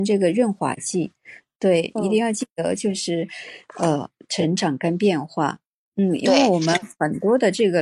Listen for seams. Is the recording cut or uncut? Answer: uncut